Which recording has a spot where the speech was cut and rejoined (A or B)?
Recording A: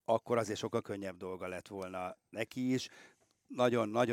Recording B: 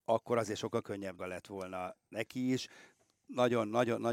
B